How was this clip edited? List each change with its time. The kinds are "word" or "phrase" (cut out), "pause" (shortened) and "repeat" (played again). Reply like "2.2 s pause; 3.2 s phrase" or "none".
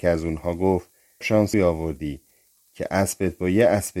1.2 s word; 1.5 s word